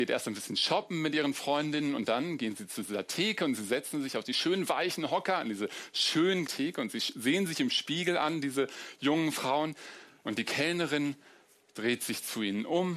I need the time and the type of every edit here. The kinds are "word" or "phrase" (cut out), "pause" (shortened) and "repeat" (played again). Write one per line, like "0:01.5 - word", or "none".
0:06.5 - word